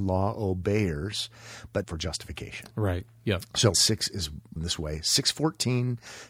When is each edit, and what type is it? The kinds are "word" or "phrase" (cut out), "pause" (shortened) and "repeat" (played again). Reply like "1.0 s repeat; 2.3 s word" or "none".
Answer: 1.8 s word; 3.7 s word; 4.6 s word